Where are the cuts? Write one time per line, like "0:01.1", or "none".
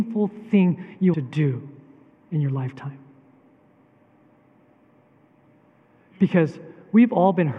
0:01.1
0:02.1

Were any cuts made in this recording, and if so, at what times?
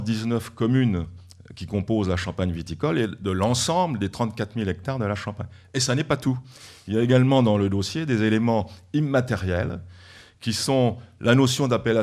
none

